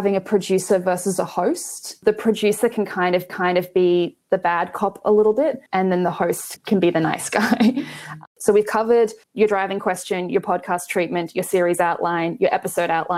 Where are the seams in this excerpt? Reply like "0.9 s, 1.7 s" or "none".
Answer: 3.3 s, 5.7 s, 6.6 s, 8.3 s, 9.2 s

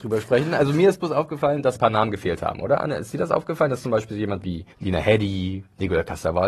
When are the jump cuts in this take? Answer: 1.8 s, 4.7 s

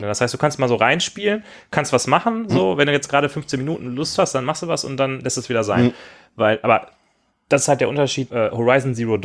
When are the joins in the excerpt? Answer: 8.3 s

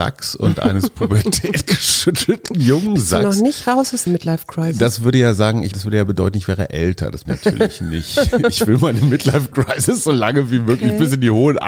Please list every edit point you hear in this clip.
4.1 s, 5.7 s, 7.2 s

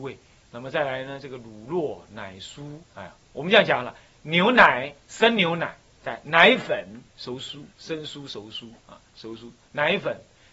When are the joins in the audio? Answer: 2.8 s, 3.2 s, 5.0 s, 7.1 s, 7.7 s, 8.8 s

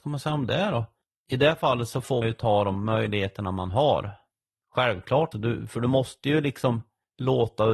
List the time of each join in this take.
2.2 s, 5.3 s

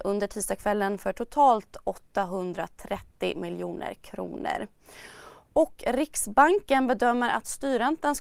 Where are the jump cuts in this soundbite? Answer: none

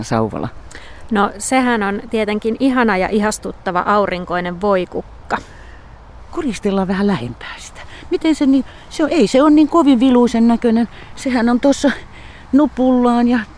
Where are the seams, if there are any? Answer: none

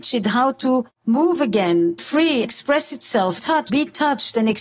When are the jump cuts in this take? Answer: 0.9 s, 2.0 s, 2.4 s, 3.4 s, 3.7 s

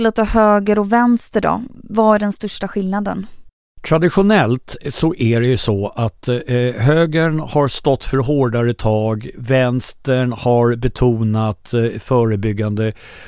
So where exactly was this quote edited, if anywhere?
none

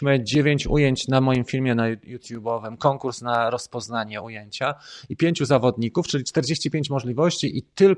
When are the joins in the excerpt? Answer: none

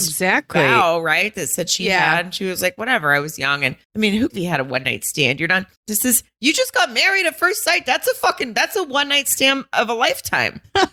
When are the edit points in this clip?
3.8 s, 4.3 s, 5.8 s

